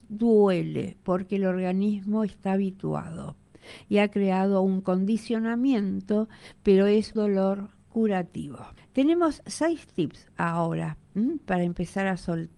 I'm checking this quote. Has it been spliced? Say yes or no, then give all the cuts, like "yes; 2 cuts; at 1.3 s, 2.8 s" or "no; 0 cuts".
yes; 2 cuts; at 7.2 s, 8.8 s